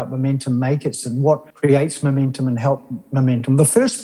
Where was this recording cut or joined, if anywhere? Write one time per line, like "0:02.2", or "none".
0:01.5